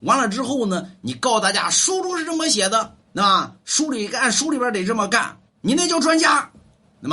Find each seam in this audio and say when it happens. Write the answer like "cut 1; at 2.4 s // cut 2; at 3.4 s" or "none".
cut 1; at 3.0 s // cut 2; at 5.5 s